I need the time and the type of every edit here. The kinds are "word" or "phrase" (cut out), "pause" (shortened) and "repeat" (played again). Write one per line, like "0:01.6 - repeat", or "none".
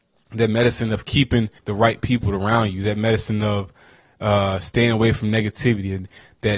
0:01.6 - pause